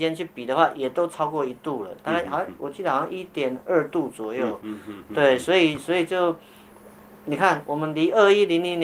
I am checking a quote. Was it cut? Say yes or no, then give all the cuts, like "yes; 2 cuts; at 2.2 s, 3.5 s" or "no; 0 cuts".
no; 0 cuts